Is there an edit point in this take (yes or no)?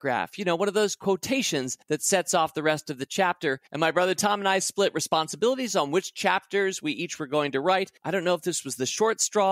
yes